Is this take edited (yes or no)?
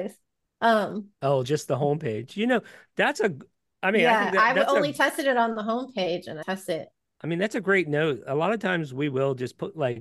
yes